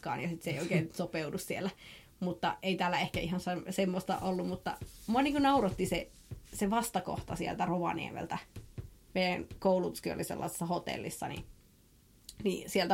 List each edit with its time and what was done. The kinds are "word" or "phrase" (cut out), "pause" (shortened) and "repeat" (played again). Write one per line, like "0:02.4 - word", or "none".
none